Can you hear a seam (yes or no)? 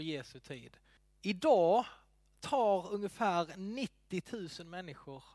yes